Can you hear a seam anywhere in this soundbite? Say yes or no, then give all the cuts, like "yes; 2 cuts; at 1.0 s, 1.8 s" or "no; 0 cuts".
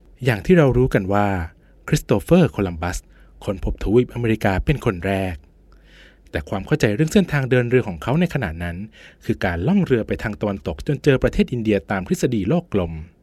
no; 0 cuts